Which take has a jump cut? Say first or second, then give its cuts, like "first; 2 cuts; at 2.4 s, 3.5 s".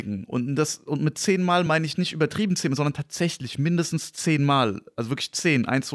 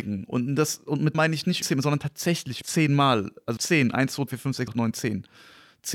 second; 6 cuts; at 1.1 s, 1.6 s, 2.6 s, 3.6 s, 4.3 s, 4.7 s